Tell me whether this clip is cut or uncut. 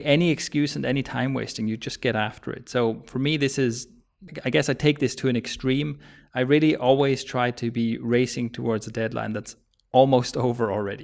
uncut